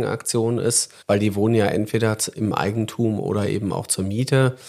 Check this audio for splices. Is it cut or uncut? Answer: cut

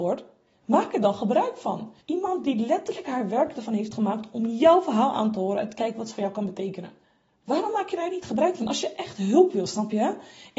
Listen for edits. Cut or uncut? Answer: cut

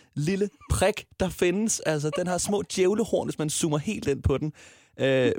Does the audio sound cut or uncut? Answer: uncut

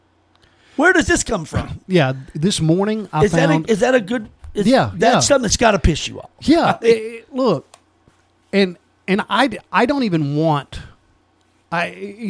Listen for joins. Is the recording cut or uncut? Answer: uncut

